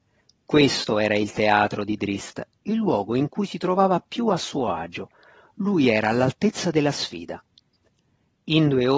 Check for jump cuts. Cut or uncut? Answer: uncut